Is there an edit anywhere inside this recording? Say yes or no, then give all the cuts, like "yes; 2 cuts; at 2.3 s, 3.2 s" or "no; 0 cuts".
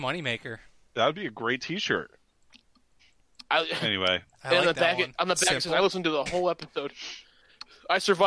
yes; 1 cut; at 6.3 s